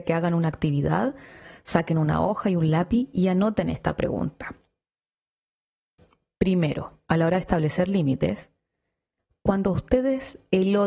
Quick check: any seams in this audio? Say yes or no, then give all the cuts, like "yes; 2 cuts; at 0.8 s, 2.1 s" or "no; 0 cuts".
no; 0 cuts